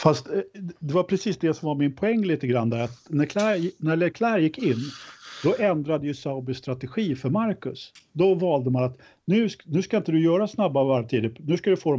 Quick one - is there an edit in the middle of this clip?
no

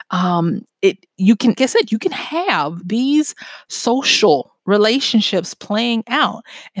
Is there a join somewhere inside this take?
yes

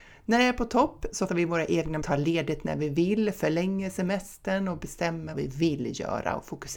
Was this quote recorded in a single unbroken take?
no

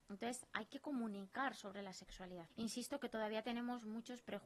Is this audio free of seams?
no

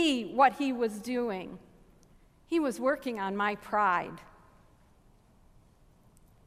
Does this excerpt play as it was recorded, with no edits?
no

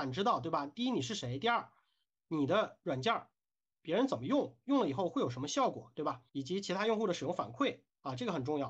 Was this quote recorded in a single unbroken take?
no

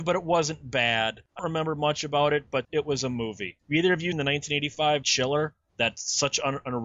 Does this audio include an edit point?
yes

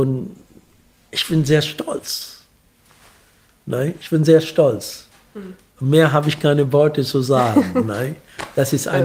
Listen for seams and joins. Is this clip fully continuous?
yes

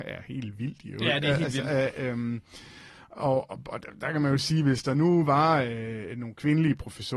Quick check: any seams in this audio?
no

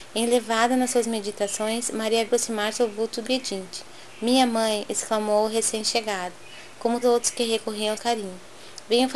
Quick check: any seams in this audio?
yes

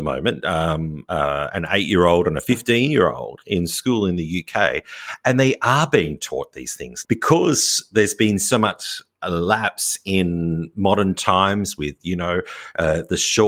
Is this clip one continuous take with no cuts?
no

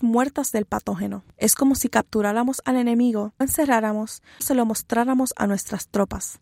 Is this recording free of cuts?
no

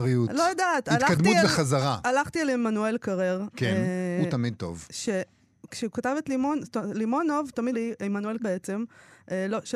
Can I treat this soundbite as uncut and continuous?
no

